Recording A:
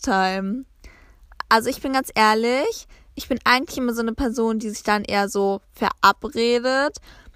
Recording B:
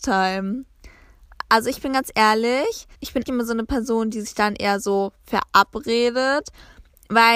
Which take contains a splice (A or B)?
B